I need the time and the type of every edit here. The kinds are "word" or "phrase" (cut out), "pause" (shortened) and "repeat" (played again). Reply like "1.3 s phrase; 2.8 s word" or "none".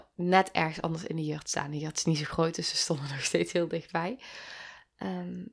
none